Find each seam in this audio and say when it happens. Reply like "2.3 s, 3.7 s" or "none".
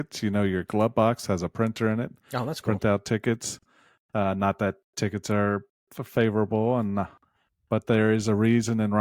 none